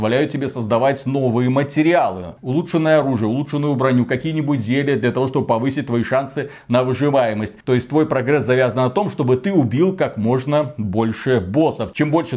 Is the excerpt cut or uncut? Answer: cut